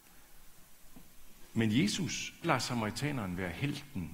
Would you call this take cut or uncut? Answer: cut